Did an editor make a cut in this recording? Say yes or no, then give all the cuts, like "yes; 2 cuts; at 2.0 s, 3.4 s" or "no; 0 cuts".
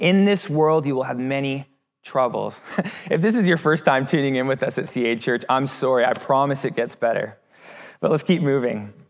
no; 0 cuts